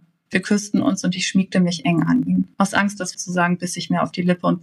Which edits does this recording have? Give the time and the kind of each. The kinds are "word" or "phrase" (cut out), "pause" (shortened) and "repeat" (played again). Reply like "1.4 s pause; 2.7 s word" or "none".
2.5 s pause; 3.1 s word